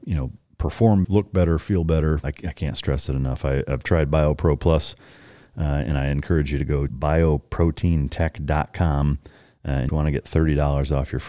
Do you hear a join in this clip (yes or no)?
yes